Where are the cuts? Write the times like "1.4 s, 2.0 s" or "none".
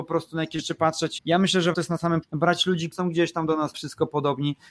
1.2 s, 1.7 s, 2.2 s, 2.9 s, 3.7 s